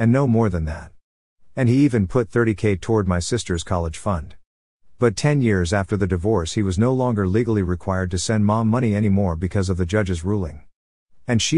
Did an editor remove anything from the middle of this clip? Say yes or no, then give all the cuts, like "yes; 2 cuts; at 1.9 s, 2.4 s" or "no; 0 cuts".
no; 0 cuts